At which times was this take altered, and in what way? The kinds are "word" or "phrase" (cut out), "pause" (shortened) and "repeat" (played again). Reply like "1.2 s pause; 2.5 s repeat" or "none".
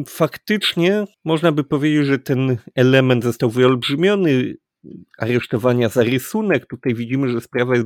1.1 s pause